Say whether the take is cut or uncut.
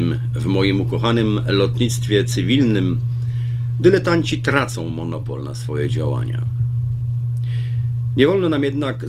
uncut